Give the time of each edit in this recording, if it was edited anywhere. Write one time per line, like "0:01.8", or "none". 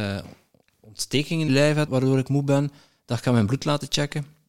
0:01.5
0:01.9